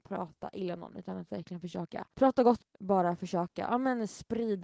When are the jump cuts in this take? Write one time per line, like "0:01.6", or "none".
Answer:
0:02.1
0:02.6